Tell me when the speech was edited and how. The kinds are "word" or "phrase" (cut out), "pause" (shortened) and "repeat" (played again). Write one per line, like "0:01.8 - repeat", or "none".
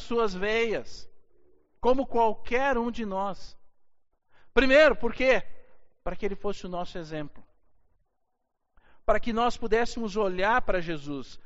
none